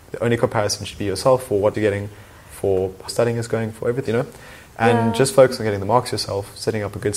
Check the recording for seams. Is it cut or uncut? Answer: cut